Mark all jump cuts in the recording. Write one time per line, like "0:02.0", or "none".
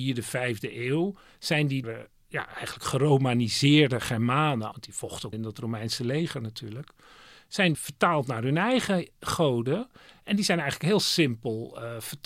0:01.8
0:04.7
0:05.3
0:07.7